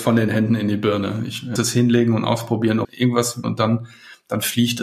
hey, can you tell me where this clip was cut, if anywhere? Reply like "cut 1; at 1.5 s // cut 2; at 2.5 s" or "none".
cut 1; at 1.6 s // cut 2; at 2.8 s // cut 3; at 3.4 s